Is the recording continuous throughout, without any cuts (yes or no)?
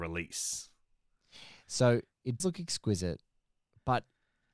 no